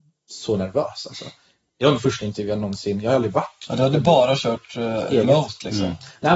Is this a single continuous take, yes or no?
yes